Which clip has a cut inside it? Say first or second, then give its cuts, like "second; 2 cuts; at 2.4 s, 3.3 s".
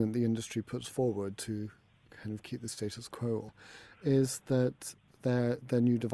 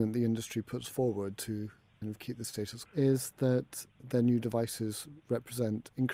second; 3 cuts; at 2.0 s, 2.9 s, 4.0 s